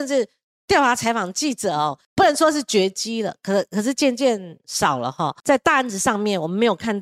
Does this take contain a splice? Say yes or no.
yes